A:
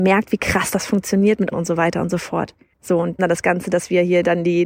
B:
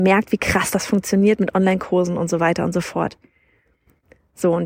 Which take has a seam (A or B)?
A